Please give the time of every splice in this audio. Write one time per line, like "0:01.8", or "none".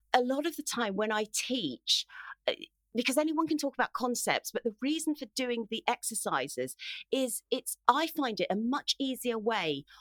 none